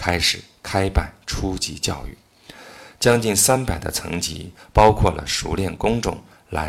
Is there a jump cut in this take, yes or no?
no